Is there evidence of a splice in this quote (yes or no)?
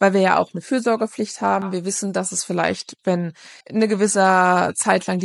yes